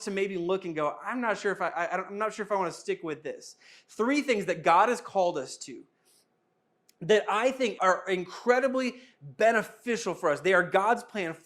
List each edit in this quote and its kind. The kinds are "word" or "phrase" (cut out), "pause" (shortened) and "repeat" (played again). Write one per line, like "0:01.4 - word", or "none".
0:07.8 - word